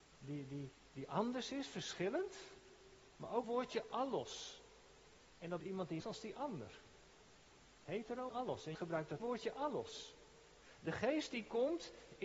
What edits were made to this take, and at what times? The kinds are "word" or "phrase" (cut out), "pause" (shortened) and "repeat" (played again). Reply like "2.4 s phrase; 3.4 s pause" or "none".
3.1 s pause; 3.4 s word; 5.3 s pause; 5.6 s word; 6.0 s phrase; 8.3 s word; 8.7 s word; 9.2 s word